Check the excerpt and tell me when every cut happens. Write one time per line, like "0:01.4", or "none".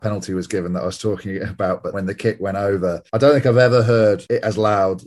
0:01.9

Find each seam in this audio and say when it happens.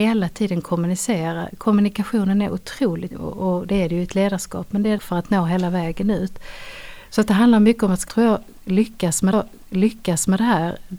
0:03.1
0:05.0
0:08.1
0:09.3

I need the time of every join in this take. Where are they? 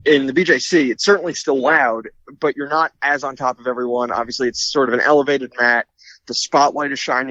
none

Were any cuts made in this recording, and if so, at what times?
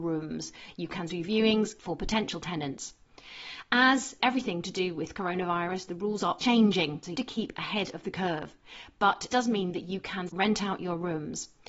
0:01.1
0:04.2
0:06.4
0:07.1
0:09.3
0:10.3

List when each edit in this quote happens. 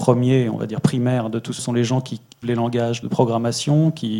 0:01.6
0:02.4
0:03.0

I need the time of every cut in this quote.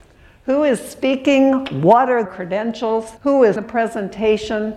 0:02.3
0:03.2
0:03.6

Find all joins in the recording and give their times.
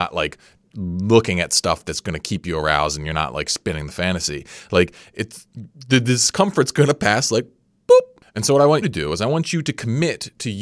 0:08.8

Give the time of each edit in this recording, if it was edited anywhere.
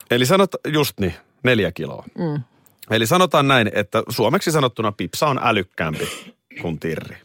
none

